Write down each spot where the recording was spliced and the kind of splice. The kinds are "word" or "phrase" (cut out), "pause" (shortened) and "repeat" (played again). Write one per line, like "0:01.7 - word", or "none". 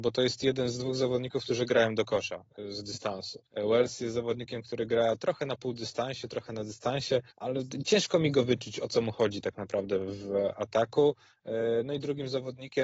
0:03.5 - pause
0:07.3 - pause